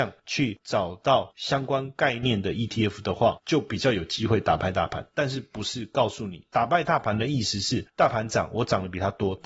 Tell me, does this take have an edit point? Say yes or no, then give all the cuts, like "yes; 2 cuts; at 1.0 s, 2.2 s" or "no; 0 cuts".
no; 0 cuts